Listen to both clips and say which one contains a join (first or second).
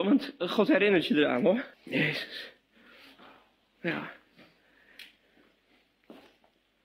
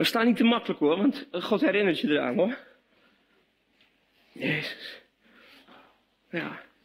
first